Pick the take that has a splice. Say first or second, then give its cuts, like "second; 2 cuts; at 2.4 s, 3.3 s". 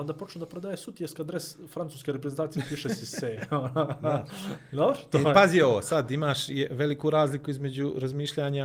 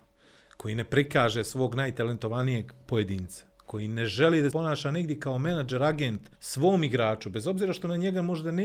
second; 2 cuts; at 4.5 s, 6.3 s